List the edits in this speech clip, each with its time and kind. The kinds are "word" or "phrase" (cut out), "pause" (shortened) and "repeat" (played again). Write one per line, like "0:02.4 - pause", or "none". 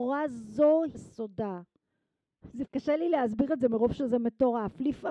0:00.9 - word
0:02.7 - word